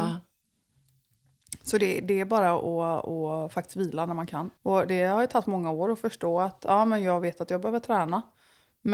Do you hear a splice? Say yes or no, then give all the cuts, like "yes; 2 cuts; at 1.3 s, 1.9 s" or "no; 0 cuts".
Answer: yes; 1 cut; at 4.6 s